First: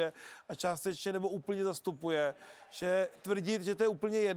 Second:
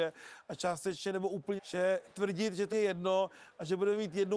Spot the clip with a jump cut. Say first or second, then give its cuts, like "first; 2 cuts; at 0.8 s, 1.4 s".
second; 2 cuts; at 1.6 s, 2.7 s